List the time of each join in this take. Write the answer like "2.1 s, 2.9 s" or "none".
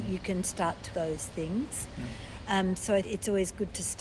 0.9 s, 3.0 s